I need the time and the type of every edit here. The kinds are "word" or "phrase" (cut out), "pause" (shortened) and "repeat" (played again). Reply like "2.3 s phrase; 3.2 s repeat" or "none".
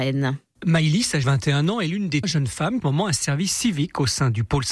1.2 s word; 2.2 s word; 2.8 s phrase